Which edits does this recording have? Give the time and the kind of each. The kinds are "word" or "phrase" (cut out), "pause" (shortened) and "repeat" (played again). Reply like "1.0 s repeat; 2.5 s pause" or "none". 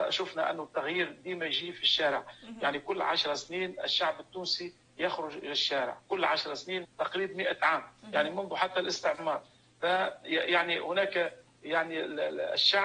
6.8 s word